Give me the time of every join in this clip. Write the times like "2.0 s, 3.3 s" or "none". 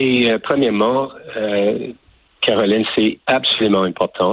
none